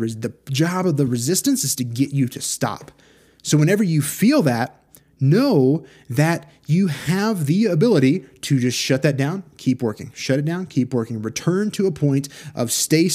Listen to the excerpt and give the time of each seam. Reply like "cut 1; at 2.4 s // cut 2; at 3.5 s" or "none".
none